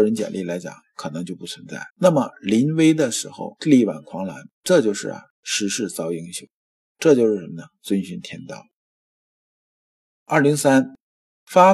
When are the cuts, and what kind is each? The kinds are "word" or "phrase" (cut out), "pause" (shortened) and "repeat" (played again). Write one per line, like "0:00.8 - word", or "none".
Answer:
0:01.9 - pause
0:04.5 - pause
0:05.3 - pause